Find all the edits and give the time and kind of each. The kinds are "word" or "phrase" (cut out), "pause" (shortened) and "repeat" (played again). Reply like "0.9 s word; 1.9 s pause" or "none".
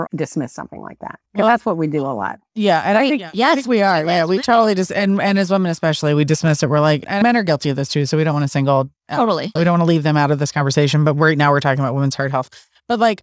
none